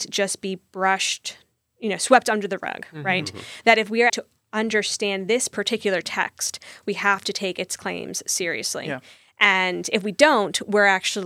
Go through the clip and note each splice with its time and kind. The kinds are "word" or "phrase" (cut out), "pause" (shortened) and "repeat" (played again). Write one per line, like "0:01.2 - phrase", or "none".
0:04.1 - word